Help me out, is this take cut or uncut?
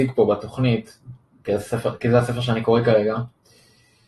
uncut